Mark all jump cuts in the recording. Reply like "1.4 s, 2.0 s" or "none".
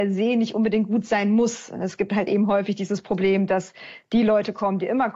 none